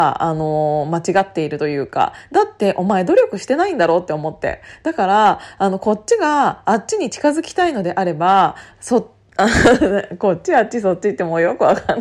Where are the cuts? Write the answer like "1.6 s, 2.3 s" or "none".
none